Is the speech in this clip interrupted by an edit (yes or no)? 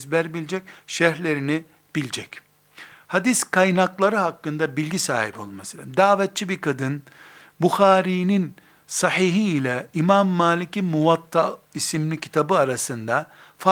no